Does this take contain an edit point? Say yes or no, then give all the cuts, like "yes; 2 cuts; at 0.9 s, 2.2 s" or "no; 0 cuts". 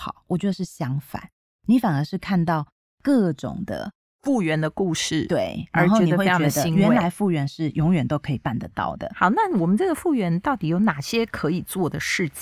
no; 0 cuts